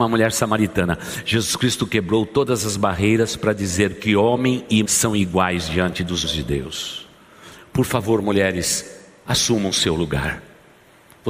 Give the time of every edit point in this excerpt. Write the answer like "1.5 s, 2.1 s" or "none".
4.9 s, 6.2 s